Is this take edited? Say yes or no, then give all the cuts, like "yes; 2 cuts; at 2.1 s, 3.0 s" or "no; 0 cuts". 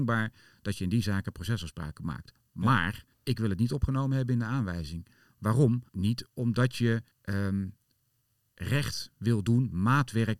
yes; 3 cuts; at 3.1 s, 5.9 s, 7.1 s